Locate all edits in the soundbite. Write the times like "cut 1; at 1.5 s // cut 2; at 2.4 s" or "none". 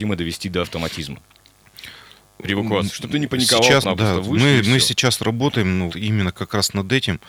cut 1; at 3.1 s // cut 2; at 3.8 s // cut 3; at 5.9 s

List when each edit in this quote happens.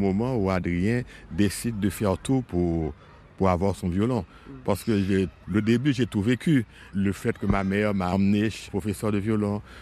cut 1; at 8.7 s

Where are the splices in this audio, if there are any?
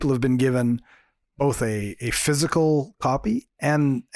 none

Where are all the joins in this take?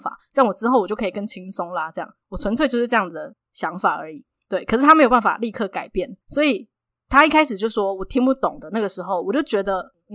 cut 1; at 6.2 s

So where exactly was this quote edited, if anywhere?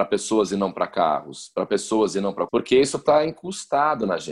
cut 1; at 2.5 s

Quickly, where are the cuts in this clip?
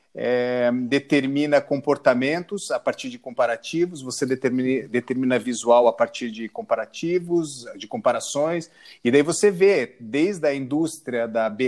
none

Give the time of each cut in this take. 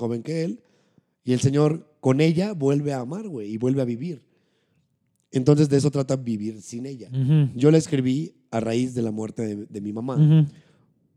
none

